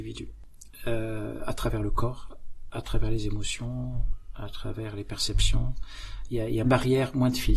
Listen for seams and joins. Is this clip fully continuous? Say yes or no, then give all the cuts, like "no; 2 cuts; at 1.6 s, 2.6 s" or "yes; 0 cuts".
no; 1 cut; at 6.6 s